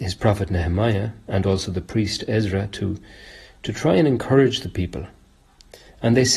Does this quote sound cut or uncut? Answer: uncut